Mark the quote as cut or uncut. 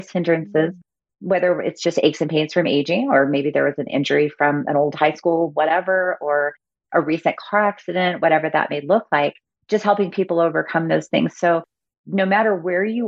uncut